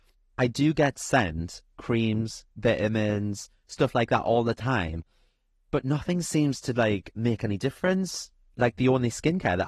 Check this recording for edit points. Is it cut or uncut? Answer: uncut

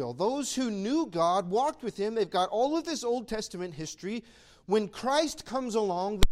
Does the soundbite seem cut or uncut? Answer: uncut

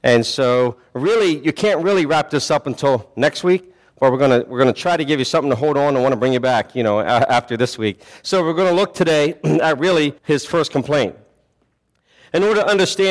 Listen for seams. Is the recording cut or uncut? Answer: cut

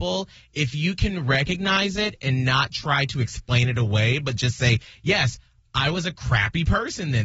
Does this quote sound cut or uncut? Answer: uncut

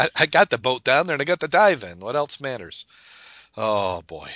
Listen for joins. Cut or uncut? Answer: uncut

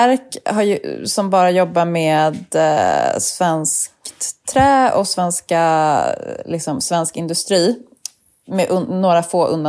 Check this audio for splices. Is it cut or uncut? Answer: uncut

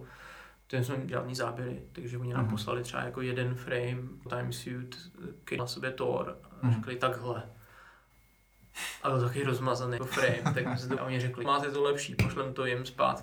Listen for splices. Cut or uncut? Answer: cut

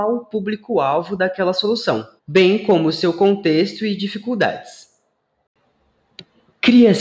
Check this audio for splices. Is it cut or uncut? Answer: cut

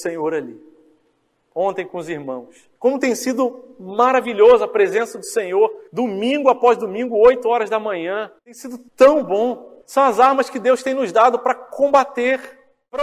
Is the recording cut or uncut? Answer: cut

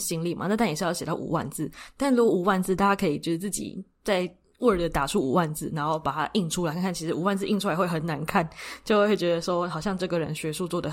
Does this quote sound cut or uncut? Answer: uncut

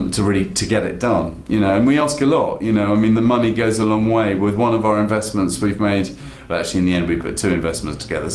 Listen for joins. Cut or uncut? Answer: uncut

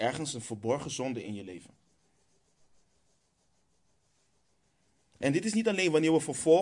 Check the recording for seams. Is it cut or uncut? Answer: uncut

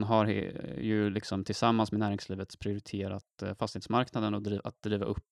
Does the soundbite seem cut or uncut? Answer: uncut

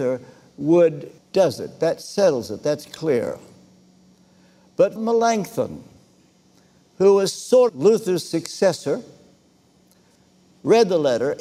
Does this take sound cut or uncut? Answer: cut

